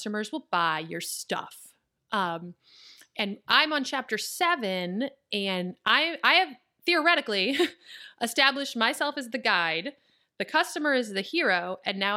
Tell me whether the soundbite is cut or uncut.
uncut